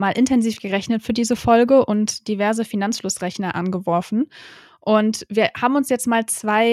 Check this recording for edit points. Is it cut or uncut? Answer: uncut